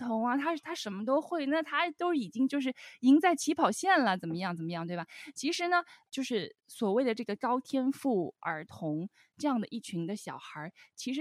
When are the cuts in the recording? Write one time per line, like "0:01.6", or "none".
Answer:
0:06.1